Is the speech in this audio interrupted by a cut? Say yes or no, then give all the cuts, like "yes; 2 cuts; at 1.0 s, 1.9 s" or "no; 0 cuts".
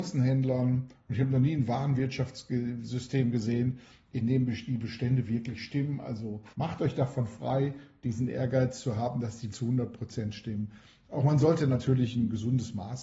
yes; 2 cuts; at 6.5 s, 9.5 s